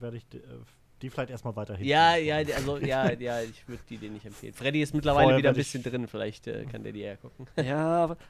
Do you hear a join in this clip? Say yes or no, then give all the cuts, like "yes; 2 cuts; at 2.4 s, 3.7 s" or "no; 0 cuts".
no; 0 cuts